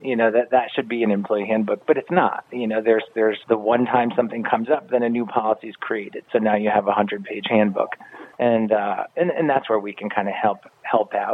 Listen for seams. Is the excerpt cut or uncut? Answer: cut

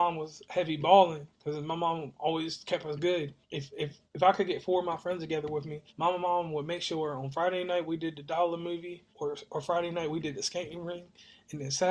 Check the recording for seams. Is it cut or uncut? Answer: cut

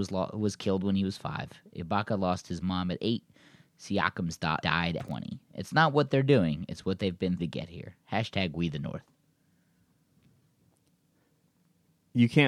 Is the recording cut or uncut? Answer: cut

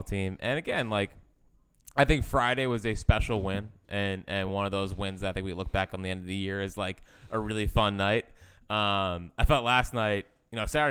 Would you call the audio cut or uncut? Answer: uncut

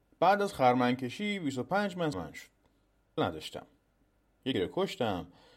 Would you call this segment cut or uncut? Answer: cut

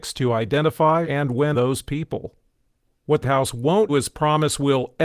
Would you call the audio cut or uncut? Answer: cut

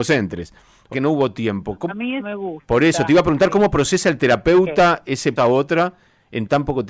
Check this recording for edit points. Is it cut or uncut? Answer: cut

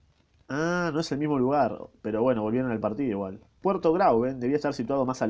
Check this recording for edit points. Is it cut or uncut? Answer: cut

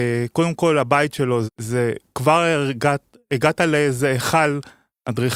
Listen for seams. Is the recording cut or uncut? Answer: cut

